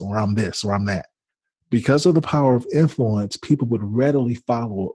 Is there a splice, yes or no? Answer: no